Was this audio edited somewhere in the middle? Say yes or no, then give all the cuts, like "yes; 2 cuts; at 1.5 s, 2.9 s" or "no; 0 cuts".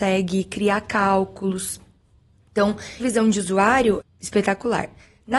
yes; 2 cuts; at 3.0 s, 4.0 s